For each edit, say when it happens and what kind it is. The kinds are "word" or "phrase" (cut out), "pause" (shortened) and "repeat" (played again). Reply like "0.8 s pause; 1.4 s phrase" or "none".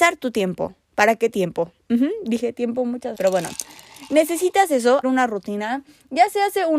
1.3 s word; 3.1 s word; 5.0 s word